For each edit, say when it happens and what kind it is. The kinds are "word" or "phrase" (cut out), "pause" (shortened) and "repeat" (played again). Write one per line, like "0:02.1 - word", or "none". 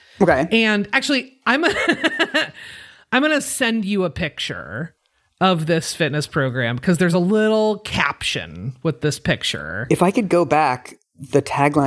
none